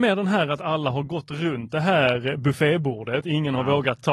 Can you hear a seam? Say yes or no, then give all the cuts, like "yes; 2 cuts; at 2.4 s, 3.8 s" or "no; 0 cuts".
no; 0 cuts